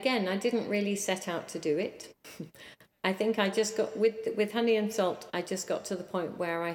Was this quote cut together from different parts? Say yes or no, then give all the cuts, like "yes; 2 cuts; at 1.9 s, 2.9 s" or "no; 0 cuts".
no; 0 cuts